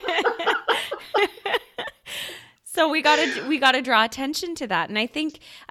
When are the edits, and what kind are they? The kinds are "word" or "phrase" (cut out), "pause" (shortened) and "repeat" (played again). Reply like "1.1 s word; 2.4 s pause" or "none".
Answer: none

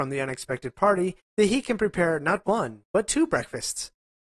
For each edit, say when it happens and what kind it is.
1.2 s pause

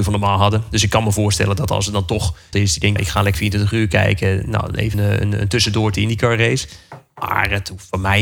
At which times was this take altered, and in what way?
2.5 s word; 3.0 s word; 3.3 s word; 4.9 s word; 5.9 s word

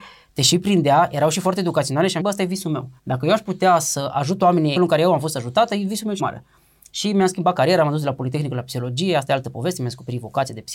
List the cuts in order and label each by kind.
2.2 s word; 3.0 s pause; 4.8 s phrase; 6.2 s word

